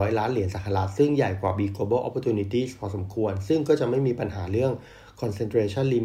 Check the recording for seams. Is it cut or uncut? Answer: uncut